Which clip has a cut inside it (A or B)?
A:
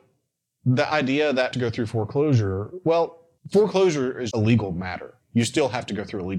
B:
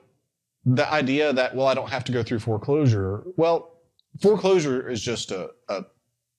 A